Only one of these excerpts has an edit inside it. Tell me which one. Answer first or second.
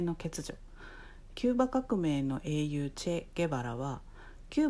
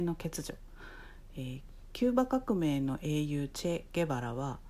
first